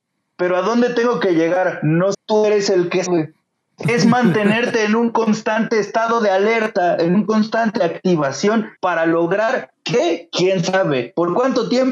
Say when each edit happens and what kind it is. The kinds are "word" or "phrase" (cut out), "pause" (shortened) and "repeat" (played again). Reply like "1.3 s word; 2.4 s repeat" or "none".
2.1 s word; 3.1 s word; 7.8 s word; 8.8 s pause